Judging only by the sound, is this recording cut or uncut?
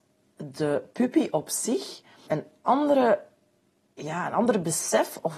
cut